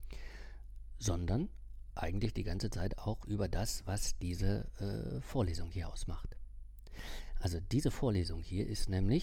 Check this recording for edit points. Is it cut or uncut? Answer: uncut